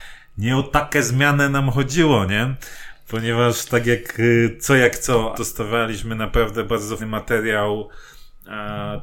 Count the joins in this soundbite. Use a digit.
2